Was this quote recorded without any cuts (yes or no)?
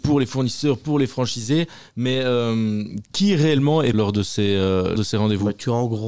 no